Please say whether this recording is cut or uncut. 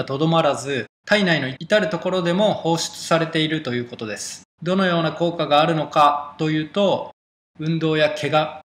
cut